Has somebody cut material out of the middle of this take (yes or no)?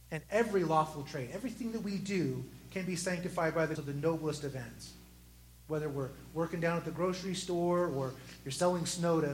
yes